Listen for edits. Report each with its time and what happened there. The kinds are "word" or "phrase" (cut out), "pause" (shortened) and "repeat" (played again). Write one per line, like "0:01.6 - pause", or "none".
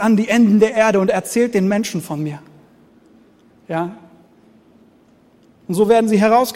none